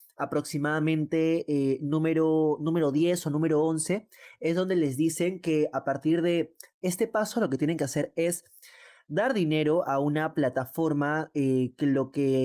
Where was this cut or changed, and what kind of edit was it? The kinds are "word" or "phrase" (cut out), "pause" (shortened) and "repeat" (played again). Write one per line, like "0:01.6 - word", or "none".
none